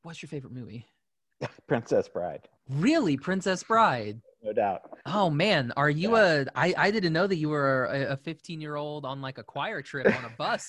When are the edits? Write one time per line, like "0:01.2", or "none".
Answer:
0:02.6
0:05.0